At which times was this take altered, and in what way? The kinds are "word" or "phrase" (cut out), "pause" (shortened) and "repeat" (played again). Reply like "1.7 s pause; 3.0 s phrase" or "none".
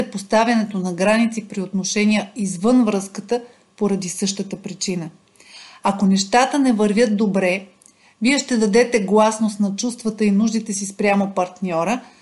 none